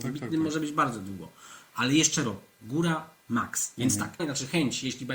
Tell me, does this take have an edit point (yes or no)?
yes